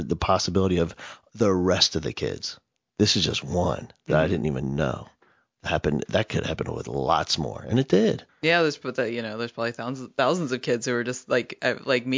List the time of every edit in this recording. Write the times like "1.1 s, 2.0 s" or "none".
8.3 s